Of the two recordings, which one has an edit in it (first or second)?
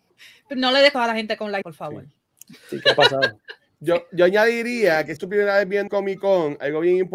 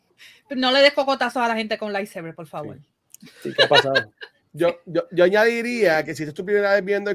first